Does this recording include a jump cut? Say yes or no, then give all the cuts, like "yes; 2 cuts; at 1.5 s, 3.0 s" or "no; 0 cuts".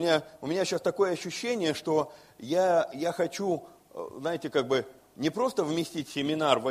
no; 0 cuts